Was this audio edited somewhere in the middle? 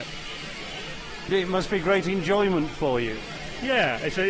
no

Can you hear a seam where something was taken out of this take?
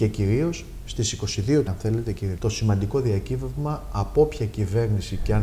yes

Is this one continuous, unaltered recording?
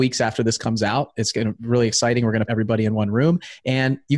no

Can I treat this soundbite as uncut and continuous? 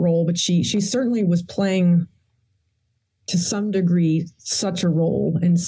yes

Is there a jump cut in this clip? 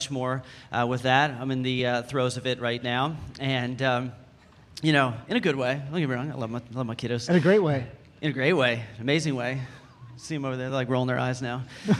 no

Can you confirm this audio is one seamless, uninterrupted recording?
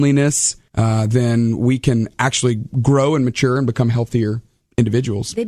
yes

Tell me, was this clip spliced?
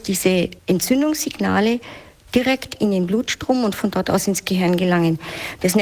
no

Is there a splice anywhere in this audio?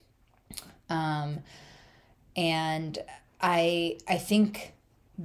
no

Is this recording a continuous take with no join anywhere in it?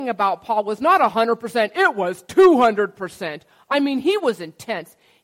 yes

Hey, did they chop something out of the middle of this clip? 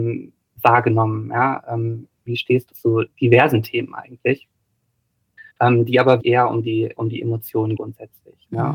yes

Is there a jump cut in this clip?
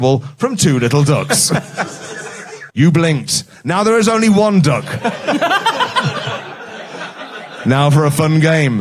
yes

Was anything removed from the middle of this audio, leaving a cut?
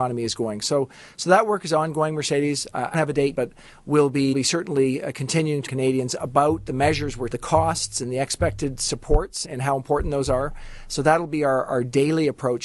yes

